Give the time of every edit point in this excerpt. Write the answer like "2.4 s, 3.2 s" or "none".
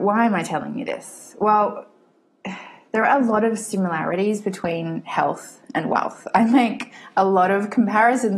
none